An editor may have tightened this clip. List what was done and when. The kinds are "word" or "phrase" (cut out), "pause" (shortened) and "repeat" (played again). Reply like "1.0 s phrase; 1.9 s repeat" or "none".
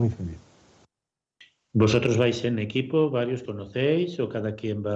3.5 s word